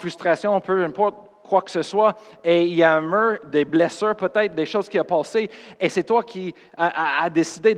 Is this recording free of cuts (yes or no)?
yes